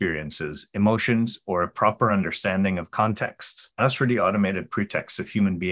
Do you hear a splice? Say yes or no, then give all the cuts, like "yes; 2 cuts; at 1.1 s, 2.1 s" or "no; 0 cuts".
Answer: no; 0 cuts